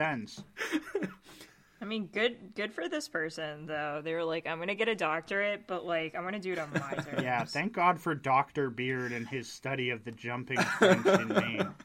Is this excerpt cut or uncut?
uncut